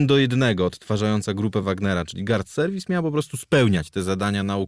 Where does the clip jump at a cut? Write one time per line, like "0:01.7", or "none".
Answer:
none